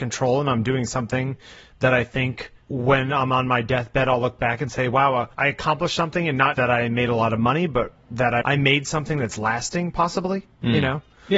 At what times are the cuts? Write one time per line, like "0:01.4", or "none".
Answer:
0:02.6
0:05.3
0:06.5
0:08.4